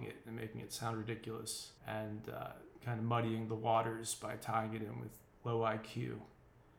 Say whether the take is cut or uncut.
cut